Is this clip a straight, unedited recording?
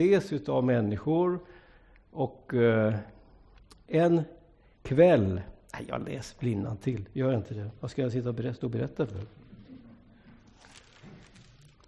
yes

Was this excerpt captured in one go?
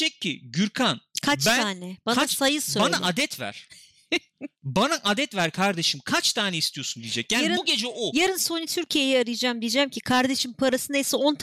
yes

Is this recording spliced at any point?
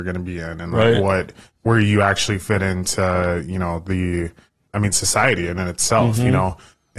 no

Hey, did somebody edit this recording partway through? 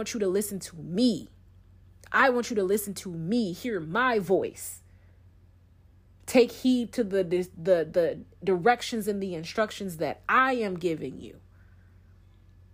no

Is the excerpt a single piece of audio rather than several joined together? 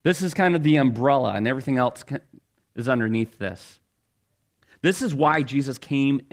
yes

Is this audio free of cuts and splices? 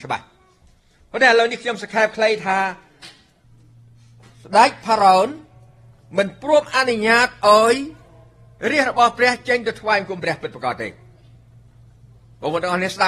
yes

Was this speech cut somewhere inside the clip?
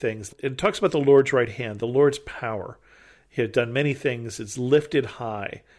no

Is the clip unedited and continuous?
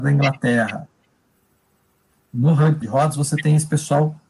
no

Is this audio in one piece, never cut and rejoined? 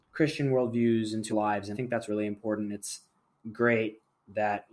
no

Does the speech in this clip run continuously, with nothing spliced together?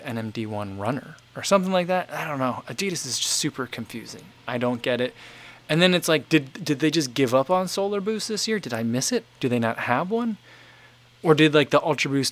no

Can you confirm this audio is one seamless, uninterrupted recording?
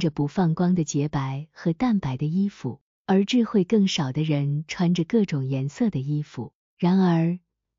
no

